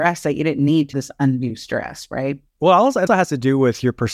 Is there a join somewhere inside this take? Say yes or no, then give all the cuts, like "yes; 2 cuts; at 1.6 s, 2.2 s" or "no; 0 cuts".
yes; 3 cuts; at 0.9 s, 2.5 s, 3.1 s